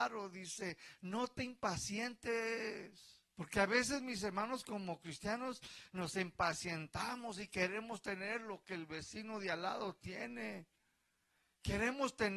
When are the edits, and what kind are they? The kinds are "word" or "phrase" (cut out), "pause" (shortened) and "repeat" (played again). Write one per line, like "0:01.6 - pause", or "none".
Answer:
0:03.3 - pause